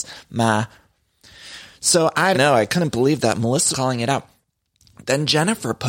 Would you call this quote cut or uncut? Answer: cut